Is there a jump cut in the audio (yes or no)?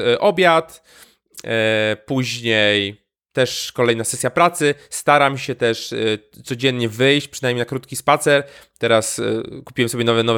no